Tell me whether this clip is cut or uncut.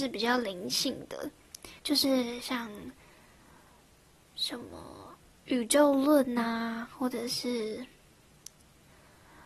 cut